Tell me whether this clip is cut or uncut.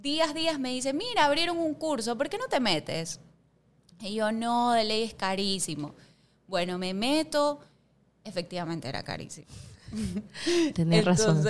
uncut